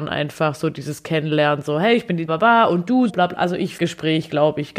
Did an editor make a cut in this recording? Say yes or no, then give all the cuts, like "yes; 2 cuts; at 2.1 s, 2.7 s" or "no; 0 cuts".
yes; 3 cuts; at 2.3 s, 3.1 s, 3.8 s